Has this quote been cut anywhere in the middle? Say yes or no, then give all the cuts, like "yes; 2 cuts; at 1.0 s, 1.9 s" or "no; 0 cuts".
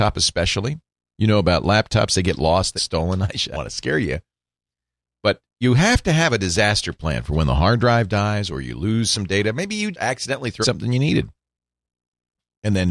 yes; 4 cuts; at 2.8 s, 3.5 s, 9.9 s, 10.6 s